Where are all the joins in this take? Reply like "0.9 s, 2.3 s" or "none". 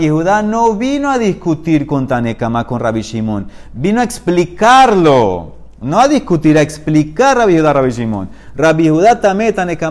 none